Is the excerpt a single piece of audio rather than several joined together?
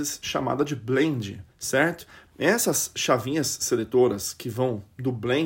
no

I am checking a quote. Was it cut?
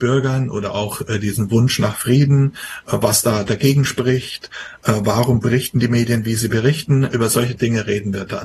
no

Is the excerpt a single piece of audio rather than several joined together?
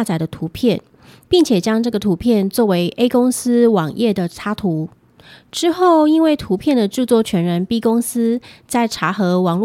yes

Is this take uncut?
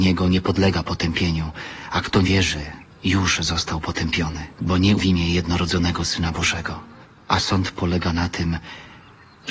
no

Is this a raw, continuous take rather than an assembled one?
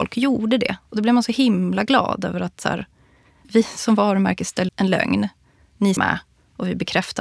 no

